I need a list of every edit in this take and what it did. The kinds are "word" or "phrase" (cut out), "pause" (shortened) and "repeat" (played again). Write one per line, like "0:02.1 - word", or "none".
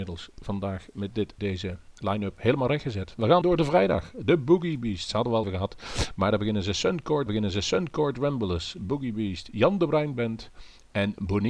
0:01.4 - word
0:03.4 - word
0:05.4 - word
0:07.3 - repeat